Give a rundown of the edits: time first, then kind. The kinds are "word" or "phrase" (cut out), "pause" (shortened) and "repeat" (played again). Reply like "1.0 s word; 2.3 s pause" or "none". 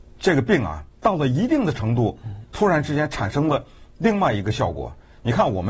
0.9 s pause